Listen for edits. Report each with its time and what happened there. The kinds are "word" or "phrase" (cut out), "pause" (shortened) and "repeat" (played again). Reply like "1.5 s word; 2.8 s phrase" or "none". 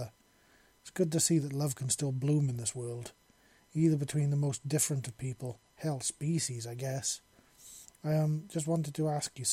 none